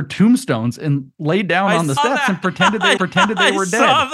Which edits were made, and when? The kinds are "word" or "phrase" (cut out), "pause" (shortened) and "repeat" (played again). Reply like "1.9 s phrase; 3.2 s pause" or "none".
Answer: 1.1 s pause; 2.0 s word; 3.0 s repeat